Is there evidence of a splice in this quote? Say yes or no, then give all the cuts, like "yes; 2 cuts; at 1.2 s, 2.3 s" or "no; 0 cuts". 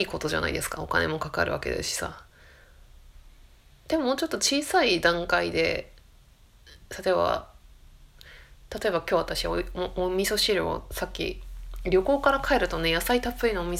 no; 0 cuts